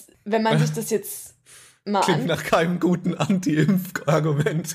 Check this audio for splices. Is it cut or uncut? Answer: uncut